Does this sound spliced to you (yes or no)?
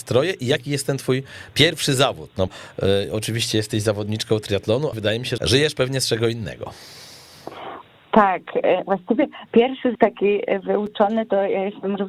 yes